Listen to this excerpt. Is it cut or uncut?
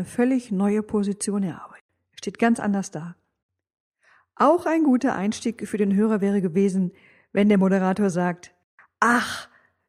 uncut